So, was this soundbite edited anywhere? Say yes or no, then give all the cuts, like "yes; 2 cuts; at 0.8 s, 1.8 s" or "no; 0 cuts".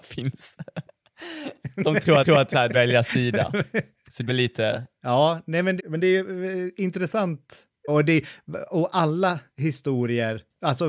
yes; 5 cuts; at 2.2 s, 2.7 s, 4.3 s, 5.8 s, 7.9 s